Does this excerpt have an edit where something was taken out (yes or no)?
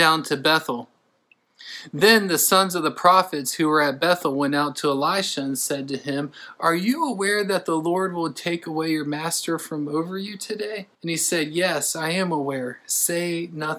yes